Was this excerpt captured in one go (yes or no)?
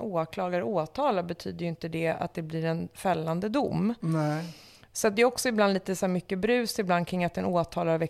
yes